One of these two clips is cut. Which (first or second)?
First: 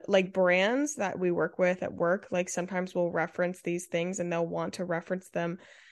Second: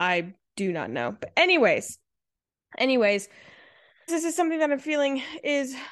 second